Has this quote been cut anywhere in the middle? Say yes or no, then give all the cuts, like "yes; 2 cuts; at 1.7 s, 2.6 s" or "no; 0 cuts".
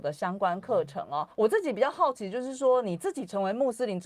yes; 1 cut; at 1.3 s